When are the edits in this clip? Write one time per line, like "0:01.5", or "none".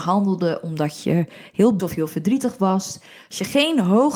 0:01.8